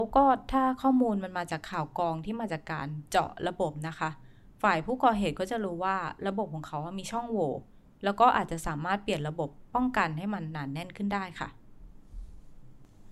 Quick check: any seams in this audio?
no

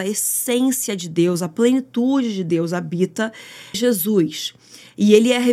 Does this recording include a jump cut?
yes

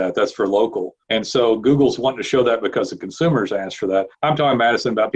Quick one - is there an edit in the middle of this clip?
yes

